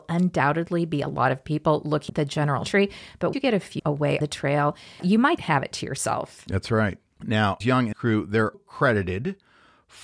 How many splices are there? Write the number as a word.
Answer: nine